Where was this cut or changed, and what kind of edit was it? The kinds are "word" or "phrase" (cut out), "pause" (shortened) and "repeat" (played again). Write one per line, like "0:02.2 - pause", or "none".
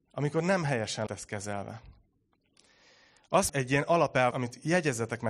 0:01.1 - word
0:03.5 - word
0:04.3 - word